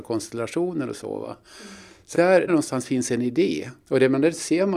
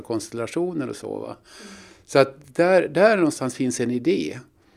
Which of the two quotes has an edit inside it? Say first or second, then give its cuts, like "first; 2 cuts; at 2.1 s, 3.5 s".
first; 3 cuts; at 2.1 s, 2.5 s, 3.8 s